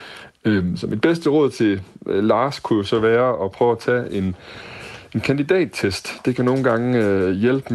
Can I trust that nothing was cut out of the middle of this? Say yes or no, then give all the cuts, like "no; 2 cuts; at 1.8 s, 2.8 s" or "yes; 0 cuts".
yes; 0 cuts